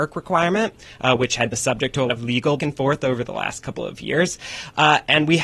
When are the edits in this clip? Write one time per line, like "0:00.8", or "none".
0:01.5
0:02.1
0:02.6